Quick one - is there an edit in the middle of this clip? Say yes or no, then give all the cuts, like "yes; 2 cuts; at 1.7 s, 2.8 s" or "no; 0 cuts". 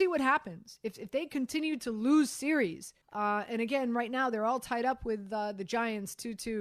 yes; 1 cut; at 3.0 s